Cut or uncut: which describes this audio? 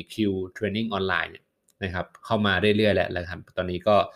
uncut